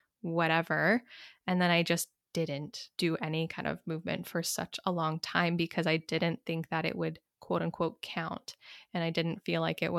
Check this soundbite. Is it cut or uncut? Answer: cut